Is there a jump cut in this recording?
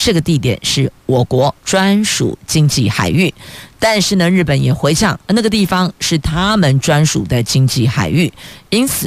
yes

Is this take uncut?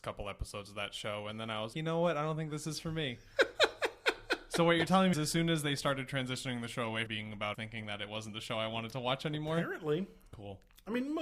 no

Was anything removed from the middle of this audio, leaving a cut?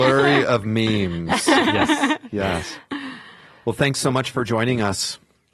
no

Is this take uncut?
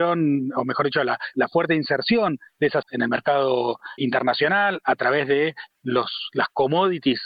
no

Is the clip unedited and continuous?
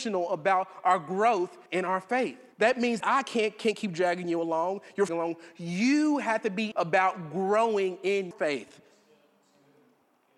no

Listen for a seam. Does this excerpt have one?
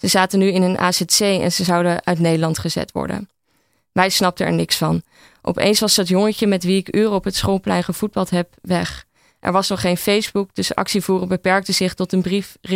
no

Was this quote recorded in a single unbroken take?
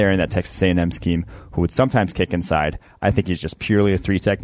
yes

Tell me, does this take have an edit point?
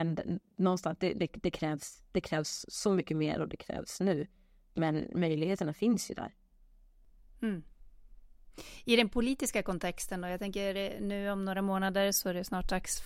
no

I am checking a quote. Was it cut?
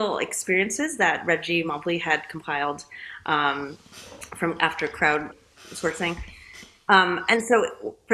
no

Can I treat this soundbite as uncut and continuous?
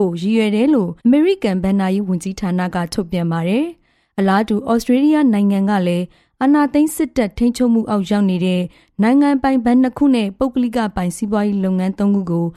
no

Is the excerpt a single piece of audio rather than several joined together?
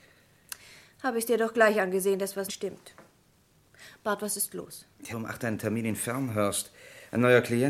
no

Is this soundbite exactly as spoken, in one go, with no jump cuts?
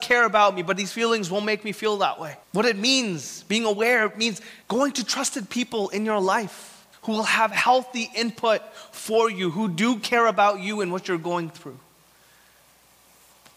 no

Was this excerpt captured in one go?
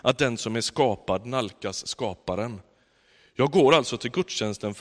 yes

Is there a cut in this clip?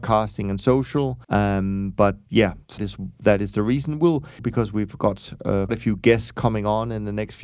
yes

